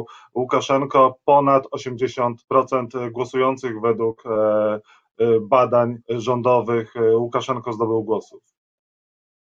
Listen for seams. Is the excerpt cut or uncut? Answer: cut